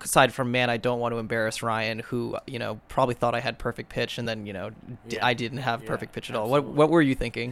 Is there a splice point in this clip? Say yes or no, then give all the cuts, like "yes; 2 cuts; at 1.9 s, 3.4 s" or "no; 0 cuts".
no; 0 cuts